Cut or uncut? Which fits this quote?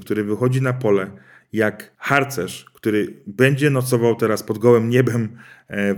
uncut